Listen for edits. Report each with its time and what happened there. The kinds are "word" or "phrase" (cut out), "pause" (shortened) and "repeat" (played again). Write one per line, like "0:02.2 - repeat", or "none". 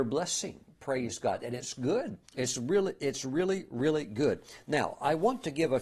0:02.3 - pause